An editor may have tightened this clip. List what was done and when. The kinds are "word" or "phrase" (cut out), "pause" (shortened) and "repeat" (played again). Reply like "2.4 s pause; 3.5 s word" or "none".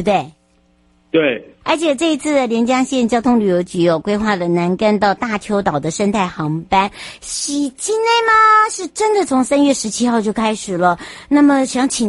1.6 s word

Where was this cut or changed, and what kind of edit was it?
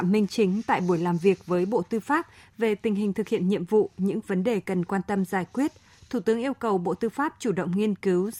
none

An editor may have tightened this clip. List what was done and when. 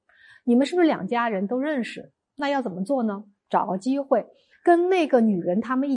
none

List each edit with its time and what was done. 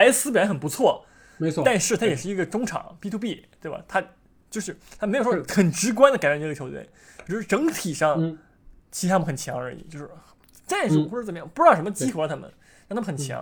none

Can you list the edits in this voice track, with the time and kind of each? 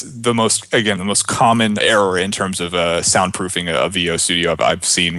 1.8 s word

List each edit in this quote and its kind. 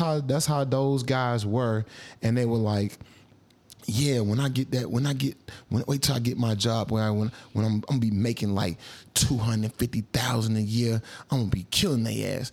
none

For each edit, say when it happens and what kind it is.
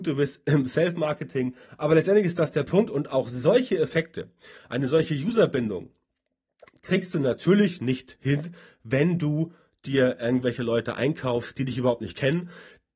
none

